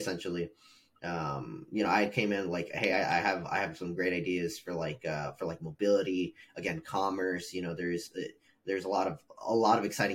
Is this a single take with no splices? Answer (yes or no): yes